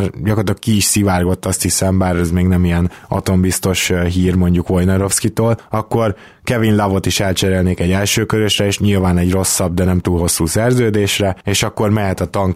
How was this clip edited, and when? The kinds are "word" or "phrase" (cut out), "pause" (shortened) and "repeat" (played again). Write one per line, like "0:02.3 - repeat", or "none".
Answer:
none